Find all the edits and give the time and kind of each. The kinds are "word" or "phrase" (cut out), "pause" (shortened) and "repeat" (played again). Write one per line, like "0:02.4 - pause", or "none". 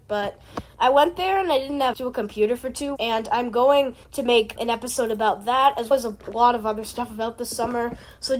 0:01.9 - word
0:03.0 - word
0:04.0 - pause
0:04.6 - word
0:05.9 - word